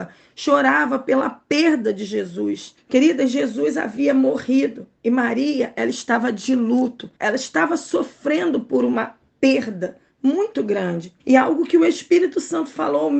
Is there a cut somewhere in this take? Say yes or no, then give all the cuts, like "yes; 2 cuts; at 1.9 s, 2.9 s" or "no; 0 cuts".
yes; 3 cuts; at 2.8 s, 7.2 s, 11.2 s